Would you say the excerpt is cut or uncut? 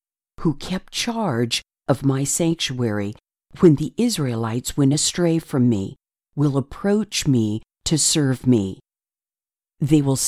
uncut